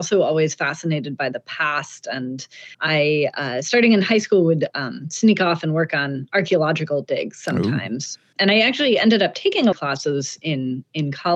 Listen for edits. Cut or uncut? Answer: cut